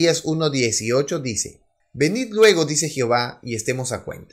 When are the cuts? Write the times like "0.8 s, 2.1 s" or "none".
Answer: 1.8 s

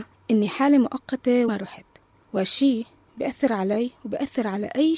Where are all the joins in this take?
1.5 s

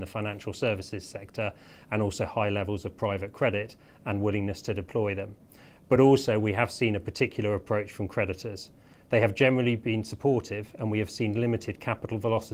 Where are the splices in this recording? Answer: none

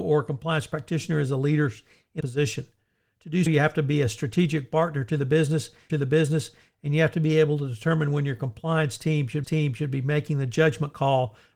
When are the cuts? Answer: 2.2 s, 5.9 s, 9.4 s

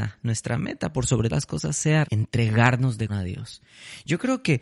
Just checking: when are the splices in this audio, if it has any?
1.3 s, 2.0 s, 3.1 s

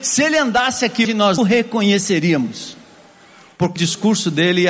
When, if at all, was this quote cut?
1.0 s, 1.4 s, 3.8 s

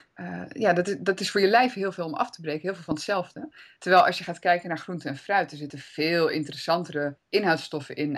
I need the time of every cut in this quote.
none

